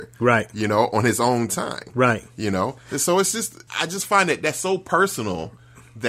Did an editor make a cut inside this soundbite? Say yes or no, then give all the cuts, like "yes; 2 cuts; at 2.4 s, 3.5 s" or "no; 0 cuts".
yes; 1 cut; at 3.7 s